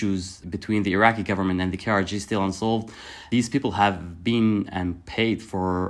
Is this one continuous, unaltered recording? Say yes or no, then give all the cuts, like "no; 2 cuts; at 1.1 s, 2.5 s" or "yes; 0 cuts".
yes; 0 cuts